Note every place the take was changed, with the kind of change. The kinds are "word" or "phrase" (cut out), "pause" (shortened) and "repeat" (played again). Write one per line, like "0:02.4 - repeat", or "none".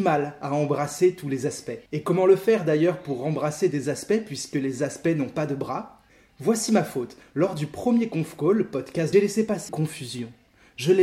0:01.9 - pause
0:06.1 - pause
0:09.1 - phrase
0:09.7 - word